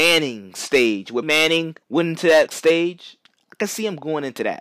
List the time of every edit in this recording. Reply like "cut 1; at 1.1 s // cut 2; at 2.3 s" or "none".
cut 1; at 1.2 s // cut 2; at 1.8 s // cut 3; at 2.5 s